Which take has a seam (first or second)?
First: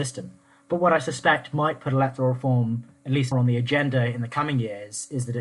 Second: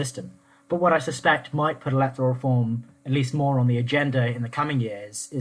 first